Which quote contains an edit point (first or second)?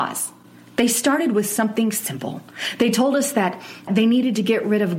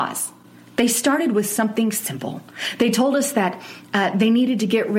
first